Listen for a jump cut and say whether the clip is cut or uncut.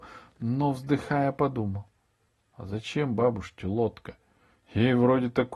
uncut